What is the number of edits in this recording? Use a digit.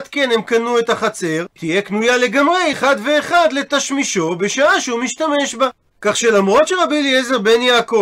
2